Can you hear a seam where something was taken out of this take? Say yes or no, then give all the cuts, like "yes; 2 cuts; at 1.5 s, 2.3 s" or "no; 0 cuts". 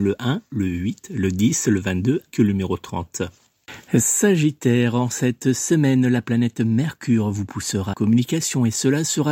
yes; 2 cuts; at 2.3 s, 7.9 s